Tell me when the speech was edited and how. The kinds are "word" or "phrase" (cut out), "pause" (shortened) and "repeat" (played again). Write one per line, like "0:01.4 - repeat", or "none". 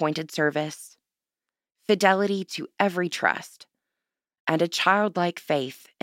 none